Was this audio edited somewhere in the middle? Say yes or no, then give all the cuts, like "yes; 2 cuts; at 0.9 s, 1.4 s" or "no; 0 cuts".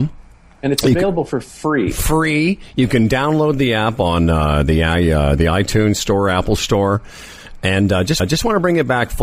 yes; 1 cut; at 8.2 s